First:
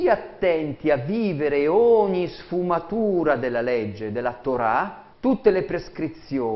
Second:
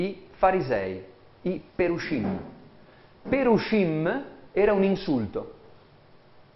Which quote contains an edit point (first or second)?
first